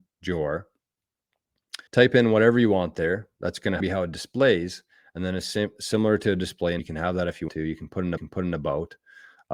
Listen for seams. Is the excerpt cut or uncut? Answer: cut